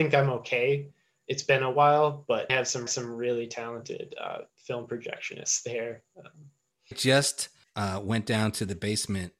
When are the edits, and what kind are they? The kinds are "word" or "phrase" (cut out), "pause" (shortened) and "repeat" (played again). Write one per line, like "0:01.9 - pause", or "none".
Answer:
0:02.5 - word
0:02.9 - repeat
0:04.5 - pause
0:06.9 - word
0:07.6 - phrase

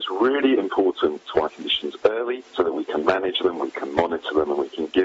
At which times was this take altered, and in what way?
0:01.5 - word

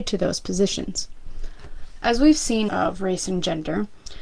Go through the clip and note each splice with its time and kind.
0:02.7 - phrase

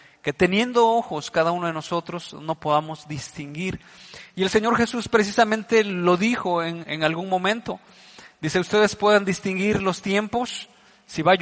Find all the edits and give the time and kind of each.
0:06.8 - word

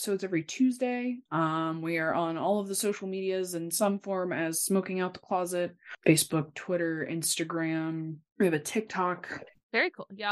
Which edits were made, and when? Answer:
0:01.3 - pause

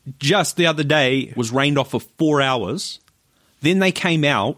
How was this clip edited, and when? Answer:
0:01.3 - phrase

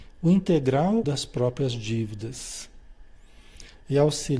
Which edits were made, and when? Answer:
0:01.0 - word

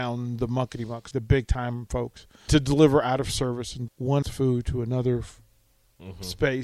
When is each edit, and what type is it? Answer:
0:01.1 - word
0:02.5 - word
0:03.9 - word
0:04.2 - word

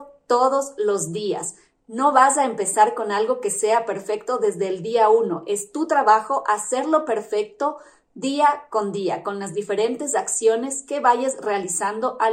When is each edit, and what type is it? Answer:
none

